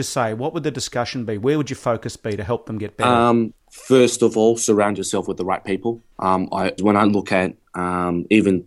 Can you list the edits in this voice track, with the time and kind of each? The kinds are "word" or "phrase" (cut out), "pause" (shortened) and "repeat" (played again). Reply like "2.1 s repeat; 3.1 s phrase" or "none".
3.6 s pause; 6.1 s pause; 6.8 s word